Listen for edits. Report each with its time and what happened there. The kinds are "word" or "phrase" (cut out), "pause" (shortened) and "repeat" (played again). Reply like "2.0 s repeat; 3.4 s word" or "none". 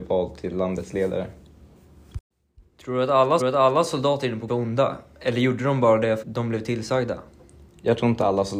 3.4 s repeat; 4.5 s word; 6.2 s word

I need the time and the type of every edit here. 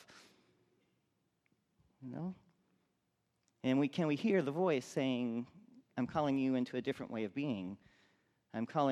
none

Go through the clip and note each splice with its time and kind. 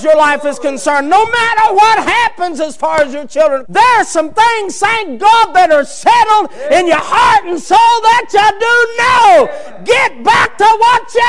3.6 s word

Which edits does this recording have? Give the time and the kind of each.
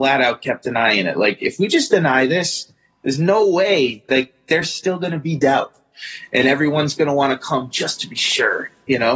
none

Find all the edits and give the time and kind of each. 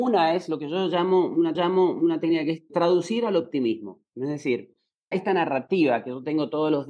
1.5 s repeat; 2.7 s word; 5.1 s word

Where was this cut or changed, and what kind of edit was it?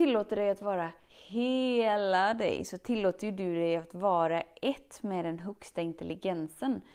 1.1 s pause

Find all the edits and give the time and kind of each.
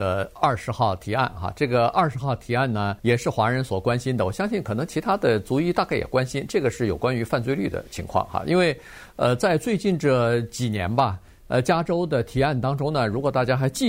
3.0 s pause

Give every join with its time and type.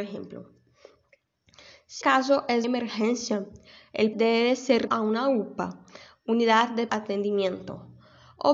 2.0 s word; 2.6 s word; 4.1 s word; 4.9 s word; 6.9 s word

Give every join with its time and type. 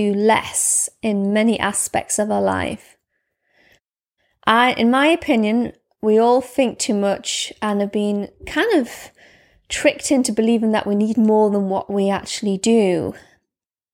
none

